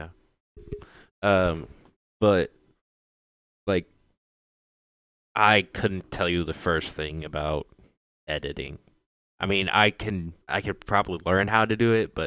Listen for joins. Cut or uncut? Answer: cut